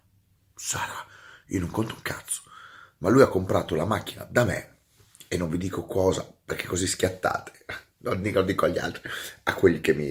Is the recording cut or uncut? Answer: uncut